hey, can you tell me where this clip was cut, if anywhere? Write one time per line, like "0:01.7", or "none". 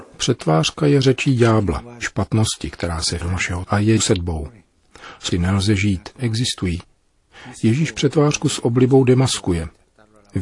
0:02.0
0:03.2
0:03.6
0:04.0
0:05.3
0:06.2